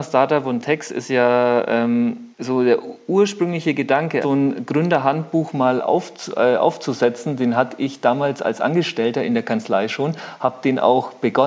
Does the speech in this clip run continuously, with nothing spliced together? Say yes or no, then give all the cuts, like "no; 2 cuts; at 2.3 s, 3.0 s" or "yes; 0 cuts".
no; 2 cuts; at 2.3 s, 4.2 s